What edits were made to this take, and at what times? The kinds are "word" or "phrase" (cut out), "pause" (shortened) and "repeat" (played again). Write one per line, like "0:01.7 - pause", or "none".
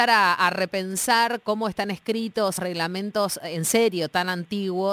0:02.6 - word